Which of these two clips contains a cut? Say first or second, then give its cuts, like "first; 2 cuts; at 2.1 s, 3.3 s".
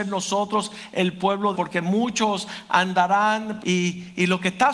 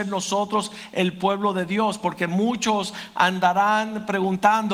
first; 2 cuts; at 1.5 s, 3.6 s